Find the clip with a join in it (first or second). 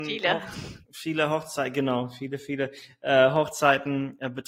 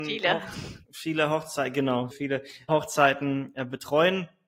second